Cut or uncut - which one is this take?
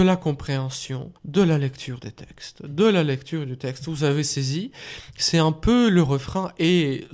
cut